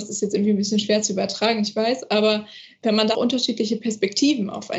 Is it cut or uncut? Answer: cut